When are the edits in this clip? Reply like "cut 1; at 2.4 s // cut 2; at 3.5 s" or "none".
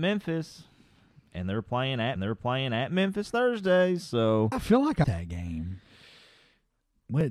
cut 1; at 2.2 s // cut 2; at 4.5 s // cut 3; at 5.0 s

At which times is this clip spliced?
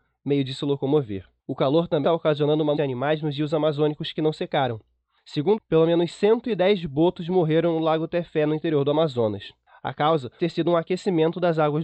cut 1; at 1.4 s // cut 2; at 2.0 s // cut 3; at 2.8 s // cut 4; at 5.6 s // cut 5; at 10.4 s

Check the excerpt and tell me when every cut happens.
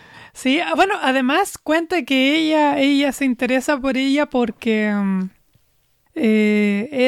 none

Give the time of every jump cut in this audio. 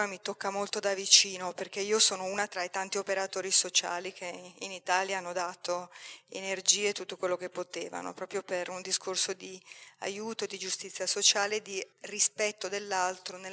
cut 1; at 11.9 s

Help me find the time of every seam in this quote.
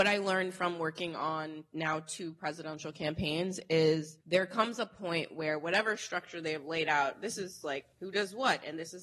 cut 1; at 4.2 s // cut 2; at 7.9 s

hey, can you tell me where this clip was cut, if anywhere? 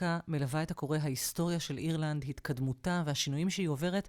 none

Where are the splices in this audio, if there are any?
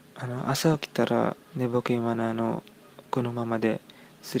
cut 1; at 1.5 s

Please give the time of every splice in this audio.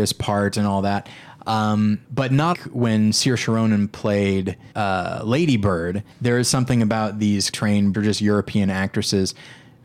cut 1; at 2.0 s // cut 2; at 2.5 s // cut 3; at 4.7 s // cut 4; at 6.1 s // cut 5; at 7.5 s // cut 6; at 7.9 s

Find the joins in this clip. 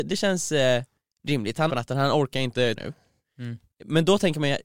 cut 1; at 1.7 s // cut 2; at 2.8 s

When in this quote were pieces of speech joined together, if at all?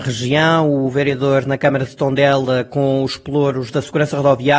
none

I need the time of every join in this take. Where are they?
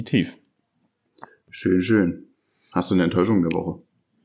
none

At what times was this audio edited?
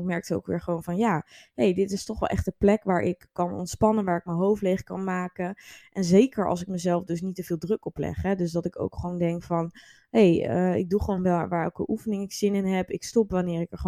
none

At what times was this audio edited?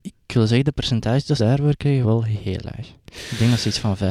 cut 1; at 1.4 s // cut 2; at 2.0 s

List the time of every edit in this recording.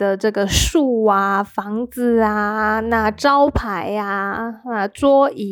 none

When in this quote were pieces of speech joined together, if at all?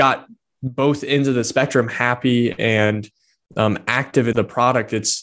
cut 1; at 4.3 s

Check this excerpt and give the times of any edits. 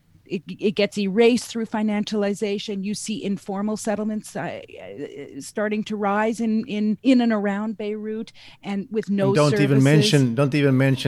cut 1; at 7.0 s

